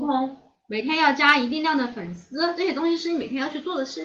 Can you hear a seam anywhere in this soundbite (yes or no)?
no